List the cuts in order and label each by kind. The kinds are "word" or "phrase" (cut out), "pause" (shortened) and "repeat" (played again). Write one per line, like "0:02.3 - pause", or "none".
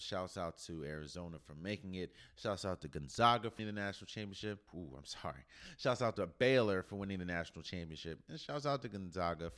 0:03.6 - word
0:04.7 - phrase